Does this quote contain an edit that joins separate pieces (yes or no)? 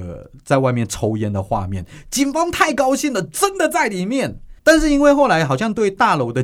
yes